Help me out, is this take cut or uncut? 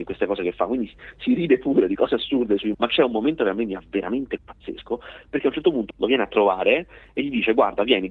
cut